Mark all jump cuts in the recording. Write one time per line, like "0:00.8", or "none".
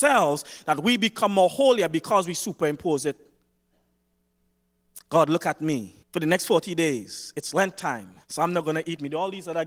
0:06.0
0:08.2